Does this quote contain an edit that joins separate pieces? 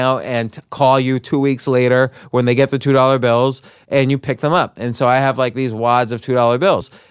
no; 0 cuts

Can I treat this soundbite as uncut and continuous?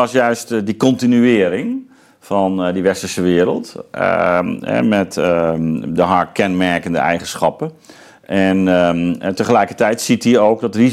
yes; 0 cuts

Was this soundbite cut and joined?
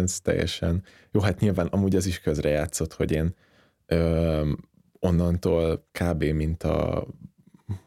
no; 0 cuts

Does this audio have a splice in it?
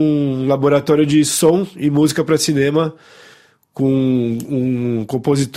no; 0 cuts

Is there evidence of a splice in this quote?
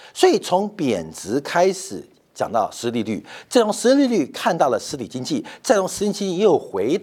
no; 0 cuts

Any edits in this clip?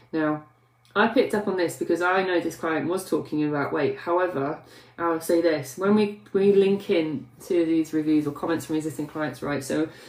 no; 0 cuts

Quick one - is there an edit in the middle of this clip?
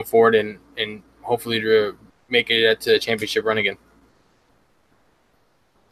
yes; 1 cut; at 2.1 s

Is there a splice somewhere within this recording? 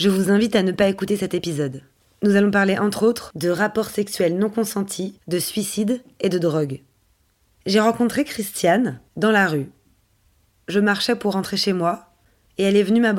no; 0 cuts

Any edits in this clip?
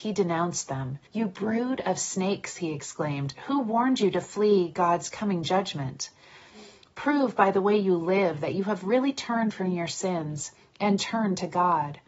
yes; 1 cut; at 1.1 s

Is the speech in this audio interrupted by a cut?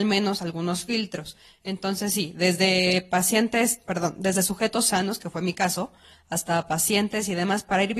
no; 0 cuts

